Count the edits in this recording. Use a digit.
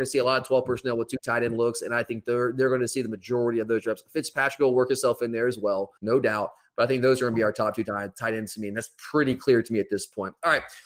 1